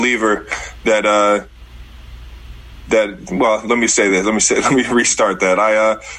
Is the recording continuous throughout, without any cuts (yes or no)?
yes